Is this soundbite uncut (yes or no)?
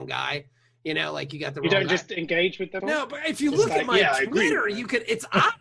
no